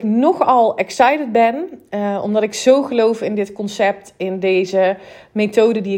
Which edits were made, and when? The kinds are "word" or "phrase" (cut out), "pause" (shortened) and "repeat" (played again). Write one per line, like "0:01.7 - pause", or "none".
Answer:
none

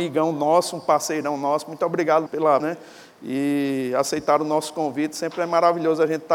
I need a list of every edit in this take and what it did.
0:02.3 - word
0:02.6 - word

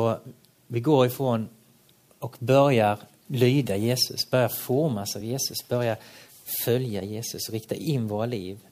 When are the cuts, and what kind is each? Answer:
none

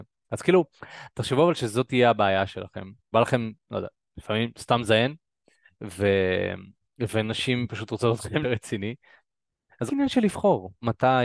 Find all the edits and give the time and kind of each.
0:03.1 - word
0:08.4 - word
0:09.9 - word

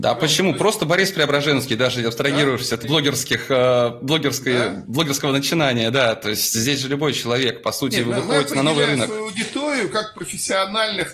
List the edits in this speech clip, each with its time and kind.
0:02.8 - word

